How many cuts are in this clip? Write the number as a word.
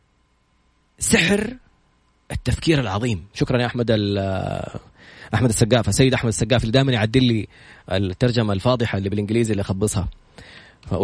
zero